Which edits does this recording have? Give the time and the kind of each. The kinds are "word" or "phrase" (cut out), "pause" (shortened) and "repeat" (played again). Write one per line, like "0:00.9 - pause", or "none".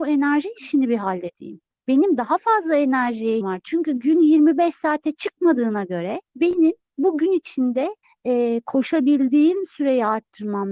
0:03.4 - word
0:06.3 - pause
0:08.0 - pause